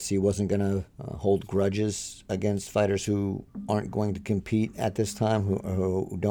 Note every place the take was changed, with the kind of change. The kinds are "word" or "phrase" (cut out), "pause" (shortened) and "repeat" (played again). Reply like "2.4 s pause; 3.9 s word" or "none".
0.9 s pause

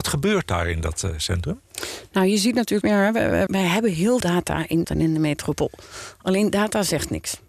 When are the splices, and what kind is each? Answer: 2.8 s word; 3.5 s word; 4.2 s word; 4.8 s word

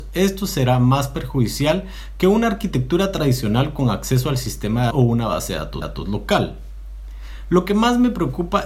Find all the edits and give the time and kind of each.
4.9 s word; 5.8 s repeat

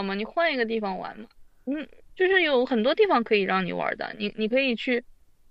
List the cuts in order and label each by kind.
none

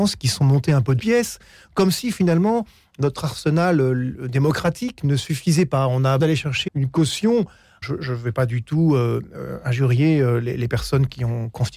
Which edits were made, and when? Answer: 1.0 s word; 6.2 s word; 6.7 s word; 7.8 s word

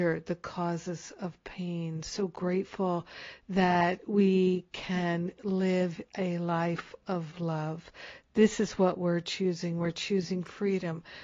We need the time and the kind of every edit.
none

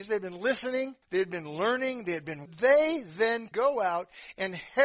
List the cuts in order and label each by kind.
1.0 s pause; 2.5 s phrase; 3.5 s word

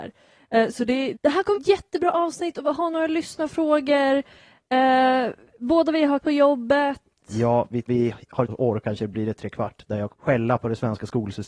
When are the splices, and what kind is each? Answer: 1.1 s word; 1.5 s word; 6.2 s word; 7.9 s word; 8.5 s word; 8.8 s word; 9.4 s word; 10.1 s word

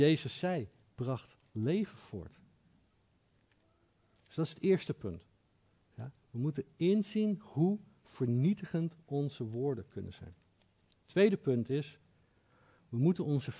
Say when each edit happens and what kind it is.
none

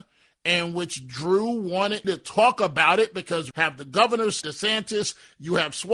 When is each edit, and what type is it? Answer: 2.0 s word; 3.5 s word; 4.4 s word

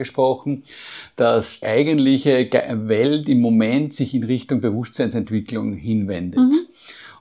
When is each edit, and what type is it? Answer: 1.6 s word

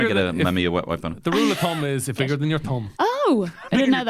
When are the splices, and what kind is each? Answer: 2.2 s word; 2.9 s pause

